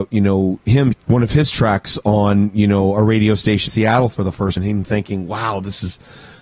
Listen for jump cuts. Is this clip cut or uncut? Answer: cut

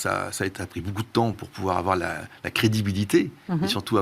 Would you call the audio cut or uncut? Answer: uncut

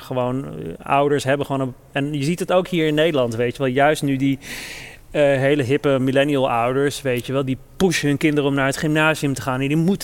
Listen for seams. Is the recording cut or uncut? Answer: uncut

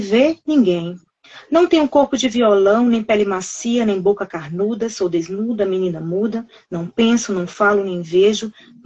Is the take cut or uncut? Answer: uncut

